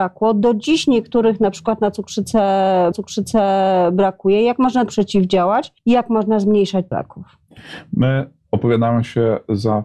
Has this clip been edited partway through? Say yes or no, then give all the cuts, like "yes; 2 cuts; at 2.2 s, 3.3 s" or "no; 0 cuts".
yes; 4 cuts; at 2.9 s, 4.9 s, 5.8 s, 6.9 s